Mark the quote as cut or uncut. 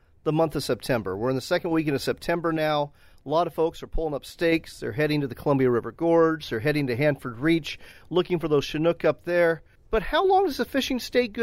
uncut